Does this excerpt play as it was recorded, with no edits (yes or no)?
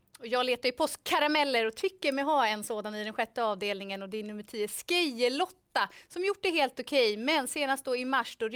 yes